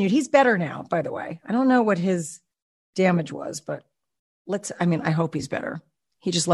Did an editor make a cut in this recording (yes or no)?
no